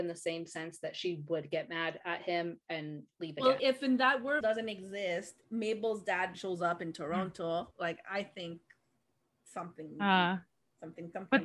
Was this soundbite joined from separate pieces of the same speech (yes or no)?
yes